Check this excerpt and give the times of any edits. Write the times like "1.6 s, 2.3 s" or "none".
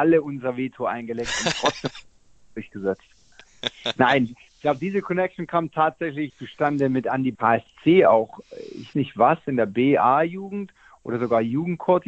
6.3 s, 7.3 s, 8.9 s